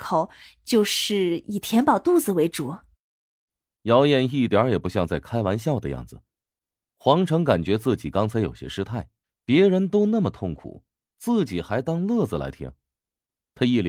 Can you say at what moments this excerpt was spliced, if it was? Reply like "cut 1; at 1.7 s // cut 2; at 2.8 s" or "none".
cut 1; at 9.2 s